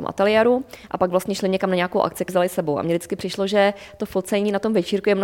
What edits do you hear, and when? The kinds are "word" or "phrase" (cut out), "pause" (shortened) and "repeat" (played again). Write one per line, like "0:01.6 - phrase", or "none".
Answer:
0:02.3 - word

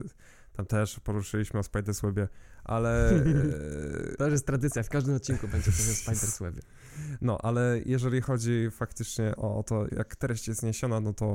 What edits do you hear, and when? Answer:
0:09.4 - word
0:09.9 - word

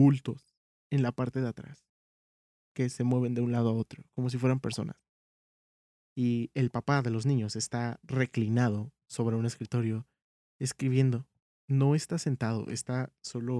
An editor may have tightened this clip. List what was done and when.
none

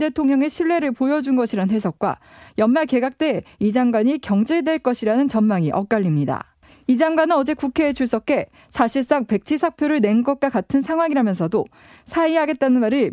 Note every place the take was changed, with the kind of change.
none

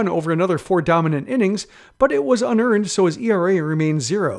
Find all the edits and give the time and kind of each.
none

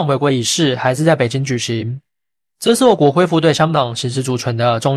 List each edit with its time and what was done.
none

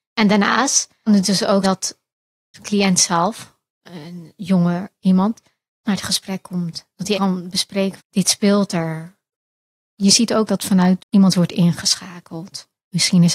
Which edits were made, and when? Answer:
0:01.1 - word
0:01.6 - word
0:02.5 - word
0:05.8 - word
0:07.1 - word
0:08.0 - word
0:10.5 - word
0:11.0 - word

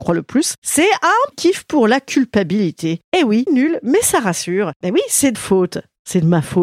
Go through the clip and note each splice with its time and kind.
0:01.3 - word
0:03.5 - word
0:05.3 - word

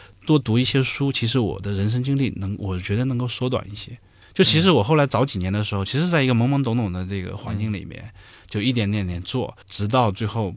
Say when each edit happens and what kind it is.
0:09.6 - pause

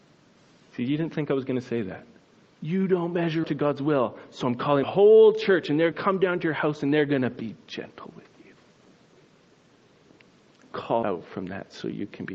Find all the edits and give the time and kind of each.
0:03.4 - word
0:04.8 - word
0:05.9 - word
0:11.0 - word

